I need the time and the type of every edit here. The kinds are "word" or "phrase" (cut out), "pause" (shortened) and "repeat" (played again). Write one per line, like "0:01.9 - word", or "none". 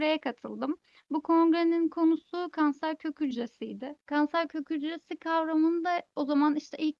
0:04.0 - pause